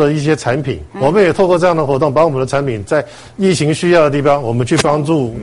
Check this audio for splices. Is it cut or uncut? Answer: cut